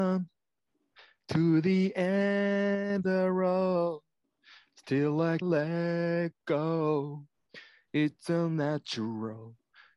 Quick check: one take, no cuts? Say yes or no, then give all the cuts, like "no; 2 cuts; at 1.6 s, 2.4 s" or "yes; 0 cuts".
no; 2 cuts; at 3.0 s, 5.4 s